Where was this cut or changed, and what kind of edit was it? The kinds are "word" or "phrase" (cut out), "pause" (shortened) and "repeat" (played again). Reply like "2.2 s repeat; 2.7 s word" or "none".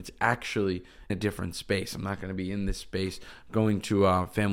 1.1 s word

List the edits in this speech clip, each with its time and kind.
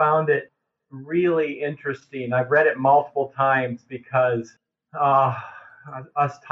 none

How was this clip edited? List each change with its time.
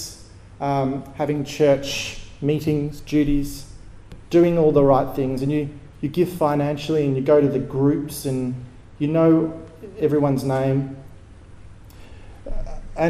8.8 s pause

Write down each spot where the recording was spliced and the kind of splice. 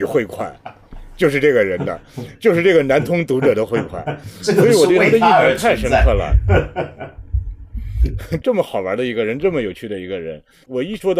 8.4 s word

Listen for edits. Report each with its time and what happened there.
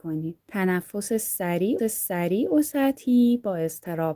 1.8 s repeat

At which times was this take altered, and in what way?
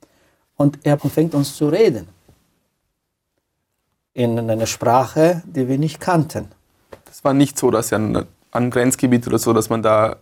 1.0 s phrase; 1.3 s phrase; 7.0 s pause

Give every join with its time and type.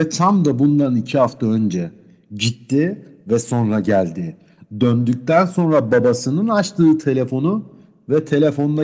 none

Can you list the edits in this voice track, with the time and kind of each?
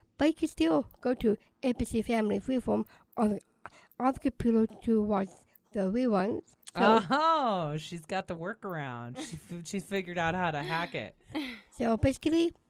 none

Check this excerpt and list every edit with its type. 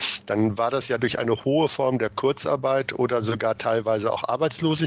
none

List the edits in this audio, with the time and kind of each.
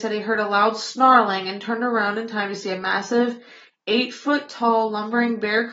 none

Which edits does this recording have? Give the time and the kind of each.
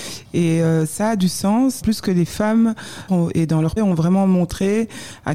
1.8 s word; 3.1 s phrase; 3.8 s word

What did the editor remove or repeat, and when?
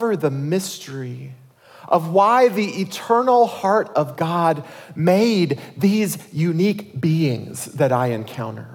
none

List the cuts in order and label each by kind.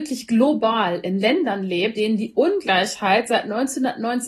1.9 s word

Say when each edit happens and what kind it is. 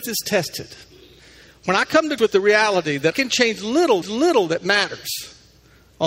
2.2 s word; 3.1 s word; 4.0 s repeat

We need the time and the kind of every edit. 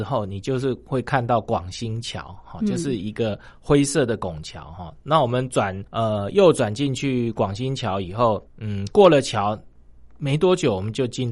5.9 s pause; 8.5 s pause

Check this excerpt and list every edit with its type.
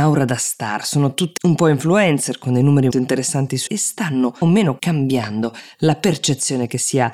1.4 s word; 2.9 s word; 3.7 s word; 4.4 s word; 4.8 s word

